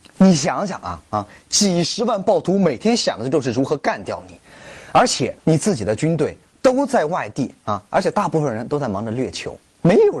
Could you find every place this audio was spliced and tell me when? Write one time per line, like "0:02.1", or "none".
0:05.4